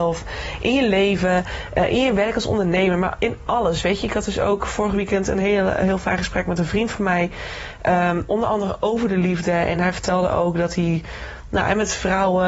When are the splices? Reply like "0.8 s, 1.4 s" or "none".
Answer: none